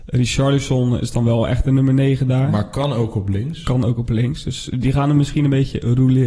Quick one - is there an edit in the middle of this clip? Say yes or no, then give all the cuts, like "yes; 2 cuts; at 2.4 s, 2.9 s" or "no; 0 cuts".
no; 0 cuts